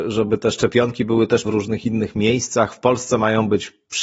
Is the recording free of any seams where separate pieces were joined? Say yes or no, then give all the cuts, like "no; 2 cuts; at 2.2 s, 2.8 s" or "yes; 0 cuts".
no; 1 cut; at 1.5 s